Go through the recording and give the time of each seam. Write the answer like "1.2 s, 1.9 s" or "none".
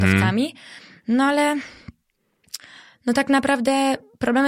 none